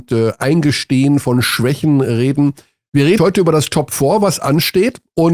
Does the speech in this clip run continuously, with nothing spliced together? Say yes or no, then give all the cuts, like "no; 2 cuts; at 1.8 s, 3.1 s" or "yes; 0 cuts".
no; 1 cut; at 3.2 s